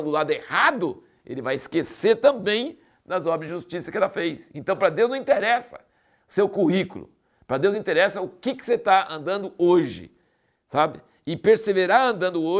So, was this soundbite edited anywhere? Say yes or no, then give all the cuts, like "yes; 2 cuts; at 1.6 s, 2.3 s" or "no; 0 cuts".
no; 0 cuts